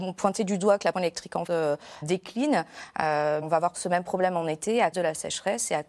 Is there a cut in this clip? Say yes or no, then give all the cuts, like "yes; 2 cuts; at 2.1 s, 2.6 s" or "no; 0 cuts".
yes; 6 cuts; at 0.9 s, 1.5 s, 2.0 s, 3.4 s, 3.7 s, 4.9 s